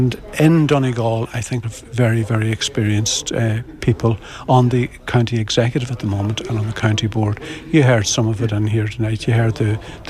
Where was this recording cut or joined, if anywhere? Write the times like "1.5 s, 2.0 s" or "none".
1.6 s